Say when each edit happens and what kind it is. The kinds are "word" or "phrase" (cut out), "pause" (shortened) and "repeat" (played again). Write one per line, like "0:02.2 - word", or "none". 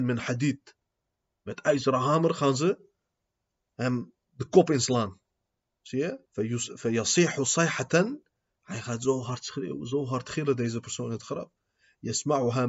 0:04.2 - pause
0:06.3 - pause